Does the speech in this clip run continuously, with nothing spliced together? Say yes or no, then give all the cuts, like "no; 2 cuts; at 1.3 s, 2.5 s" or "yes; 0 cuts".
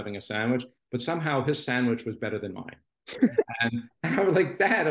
yes; 0 cuts